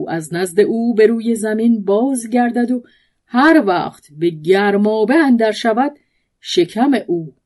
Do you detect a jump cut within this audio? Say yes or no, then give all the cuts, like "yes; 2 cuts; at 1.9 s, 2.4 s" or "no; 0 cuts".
no; 0 cuts